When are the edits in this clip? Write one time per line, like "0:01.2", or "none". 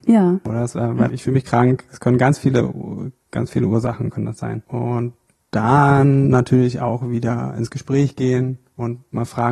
none